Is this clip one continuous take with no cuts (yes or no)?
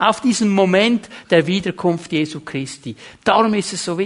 yes